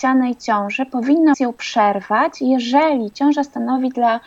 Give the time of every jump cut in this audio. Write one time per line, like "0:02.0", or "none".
0:01.3